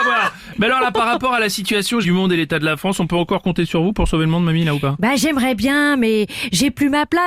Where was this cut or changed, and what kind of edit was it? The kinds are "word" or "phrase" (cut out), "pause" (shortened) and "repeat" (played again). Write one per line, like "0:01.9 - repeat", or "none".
0:02.0 - word

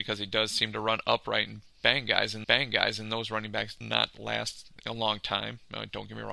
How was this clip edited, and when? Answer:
0:02.4 - repeat
0:03.8 - word

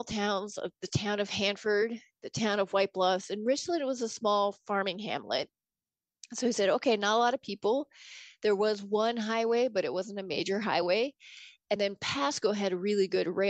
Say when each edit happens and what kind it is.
none

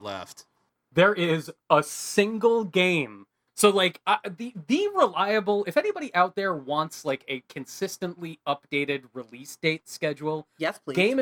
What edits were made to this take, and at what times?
none

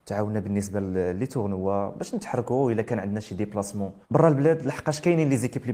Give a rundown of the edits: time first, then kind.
0:04.0 - pause

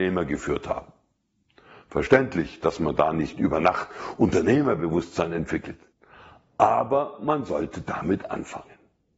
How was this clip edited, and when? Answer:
none

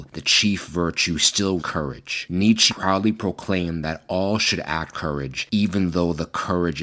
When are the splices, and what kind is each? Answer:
0:01.6 - word
0:02.7 - word
0:04.9 - word

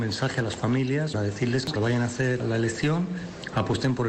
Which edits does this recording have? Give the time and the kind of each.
0:01.1 - word
0:01.8 - word
0:02.4 - word

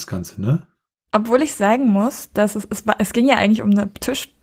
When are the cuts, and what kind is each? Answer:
none

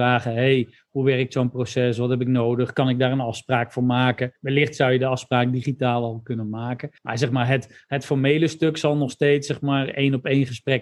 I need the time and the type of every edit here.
0:04.4 - pause
0:07.0 - pause

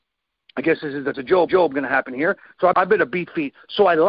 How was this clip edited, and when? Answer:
0:01.1 - word
0:01.5 - repeat
0:02.7 - word

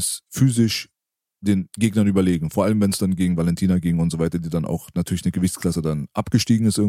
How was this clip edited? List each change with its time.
none

